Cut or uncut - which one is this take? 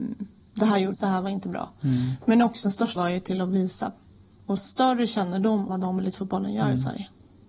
cut